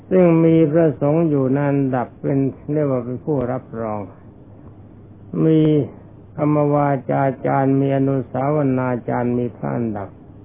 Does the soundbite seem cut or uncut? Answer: cut